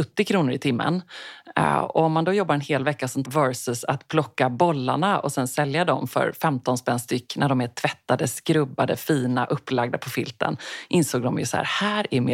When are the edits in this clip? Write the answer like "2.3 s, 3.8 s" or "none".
3.3 s